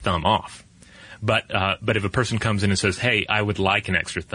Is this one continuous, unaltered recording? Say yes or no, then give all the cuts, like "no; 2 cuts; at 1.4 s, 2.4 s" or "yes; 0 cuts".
yes; 0 cuts